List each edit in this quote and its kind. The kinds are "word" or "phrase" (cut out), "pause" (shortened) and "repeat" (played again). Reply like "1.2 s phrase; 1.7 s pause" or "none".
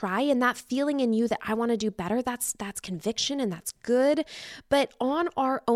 none